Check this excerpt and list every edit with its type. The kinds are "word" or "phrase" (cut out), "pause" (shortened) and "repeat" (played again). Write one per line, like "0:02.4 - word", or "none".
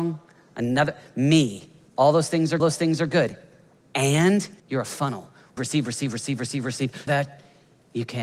0:01.9 - pause
0:02.6 - repeat
0:04.6 - pause
0:05.6 - phrase
0:06.4 - word
0:07.1 - word